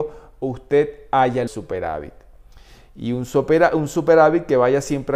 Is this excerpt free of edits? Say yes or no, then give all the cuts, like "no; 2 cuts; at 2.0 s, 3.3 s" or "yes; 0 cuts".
no; 1 cut; at 1.5 s